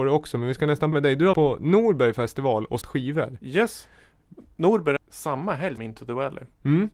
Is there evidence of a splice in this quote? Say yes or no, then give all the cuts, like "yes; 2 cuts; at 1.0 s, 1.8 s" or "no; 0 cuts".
yes; 5 cuts; at 0.9 s, 1.3 s, 2.8 s, 5.0 s, 5.8 s